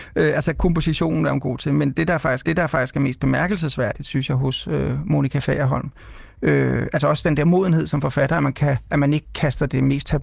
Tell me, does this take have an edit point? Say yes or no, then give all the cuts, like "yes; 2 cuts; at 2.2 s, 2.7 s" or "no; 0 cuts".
yes; 1 cut; at 2.4 s